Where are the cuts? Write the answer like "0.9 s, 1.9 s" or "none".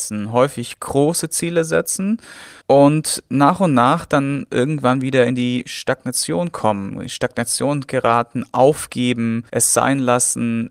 2.6 s, 9.5 s